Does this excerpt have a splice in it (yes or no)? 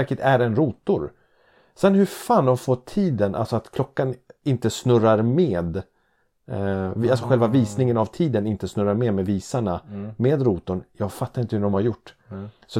no